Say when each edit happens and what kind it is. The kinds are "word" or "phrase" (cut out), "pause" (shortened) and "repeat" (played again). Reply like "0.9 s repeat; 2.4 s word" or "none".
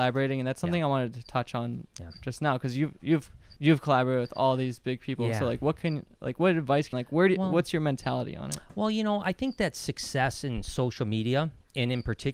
3.6 s pause; 6.9 s phrase